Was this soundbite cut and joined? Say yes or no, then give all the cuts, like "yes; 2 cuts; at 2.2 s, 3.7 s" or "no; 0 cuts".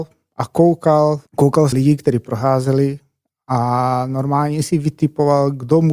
yes; 2 cuts; at 1.3 s, 1.7 s